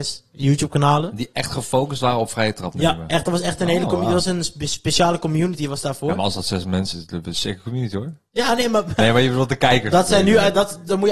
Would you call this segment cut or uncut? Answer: cut